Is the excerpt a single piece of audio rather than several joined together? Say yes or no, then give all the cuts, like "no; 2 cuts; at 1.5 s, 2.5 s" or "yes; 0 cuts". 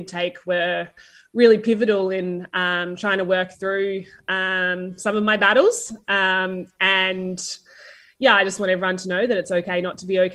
yes; 0 cuts